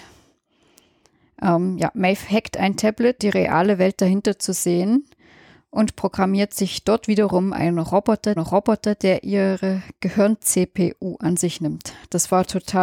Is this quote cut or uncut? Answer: cut